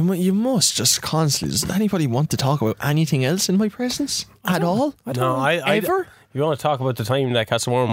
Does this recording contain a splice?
no; 0 cuts

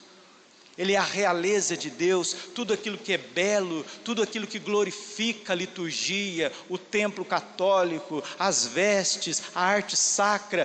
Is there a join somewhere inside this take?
no; 0 cuts

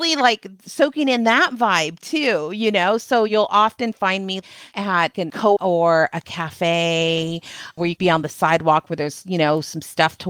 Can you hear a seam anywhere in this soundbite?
yes; 3 cuts; at 5.1 s, 5.6 s, 8.0 s

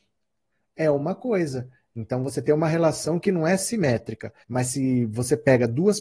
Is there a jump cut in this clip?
yes; 1 cut; at 4.4 s

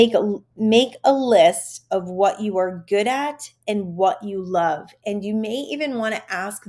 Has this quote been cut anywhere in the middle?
no; 0 cuts

